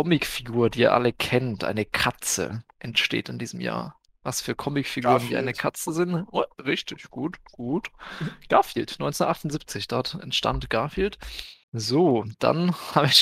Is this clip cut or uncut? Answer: cut